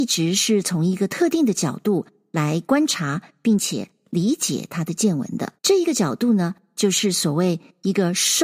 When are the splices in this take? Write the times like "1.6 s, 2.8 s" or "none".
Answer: 5.6 s